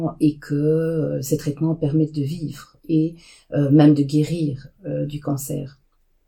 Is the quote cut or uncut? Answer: uncut